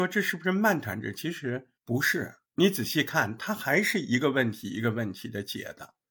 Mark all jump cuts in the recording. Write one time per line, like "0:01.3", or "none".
0:01.8
0:02.5